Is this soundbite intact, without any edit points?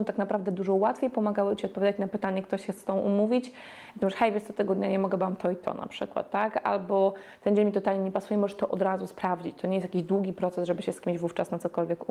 yes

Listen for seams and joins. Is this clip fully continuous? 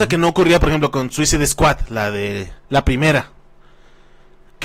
no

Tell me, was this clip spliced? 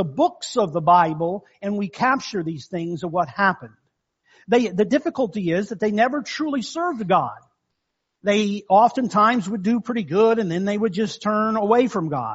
no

